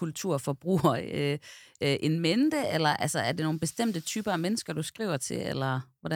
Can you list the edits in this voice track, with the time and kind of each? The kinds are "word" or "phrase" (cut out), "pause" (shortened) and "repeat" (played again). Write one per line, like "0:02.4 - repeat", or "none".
none